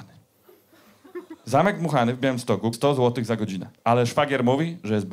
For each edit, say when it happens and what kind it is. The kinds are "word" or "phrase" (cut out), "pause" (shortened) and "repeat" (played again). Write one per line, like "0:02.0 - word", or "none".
0:02.7 - word
0:03.8 - pause